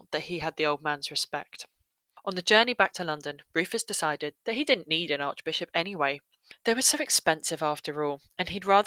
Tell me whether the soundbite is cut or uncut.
uncut